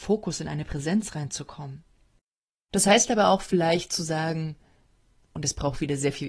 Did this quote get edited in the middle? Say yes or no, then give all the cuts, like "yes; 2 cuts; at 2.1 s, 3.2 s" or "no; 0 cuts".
no; 0 cuts